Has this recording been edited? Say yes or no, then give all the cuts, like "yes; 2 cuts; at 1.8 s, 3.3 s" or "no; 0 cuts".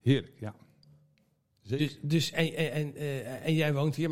yes; 1 cut; at 2.3 s